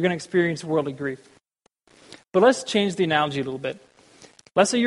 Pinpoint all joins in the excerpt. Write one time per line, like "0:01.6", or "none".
none